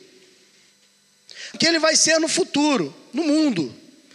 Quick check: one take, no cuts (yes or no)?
no